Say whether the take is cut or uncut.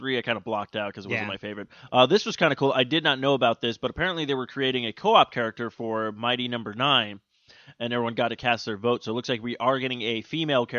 uncut